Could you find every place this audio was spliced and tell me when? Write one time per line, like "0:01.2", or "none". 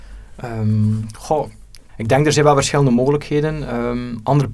0:01.9